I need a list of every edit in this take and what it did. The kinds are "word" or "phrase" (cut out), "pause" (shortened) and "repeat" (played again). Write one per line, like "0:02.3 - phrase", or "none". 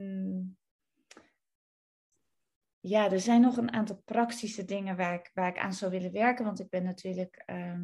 none

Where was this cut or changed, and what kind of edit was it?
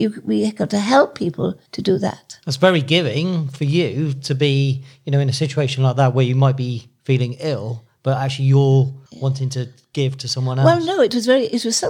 0:01.7 - pause
0:02.4 - pause
0:09.1 - pause

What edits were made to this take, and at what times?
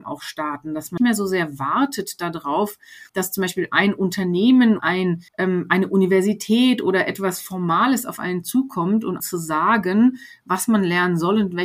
0:01.0 - word
0:03.1 - pause
0:04.8 - word
0:05.3 - pause
0:09.2 - word

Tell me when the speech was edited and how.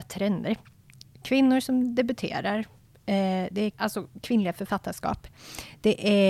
0:03.7 - word

